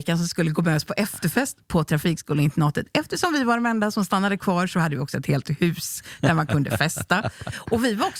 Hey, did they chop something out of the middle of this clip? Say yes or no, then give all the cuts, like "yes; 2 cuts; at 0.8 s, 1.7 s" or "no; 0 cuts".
no; 0 cuts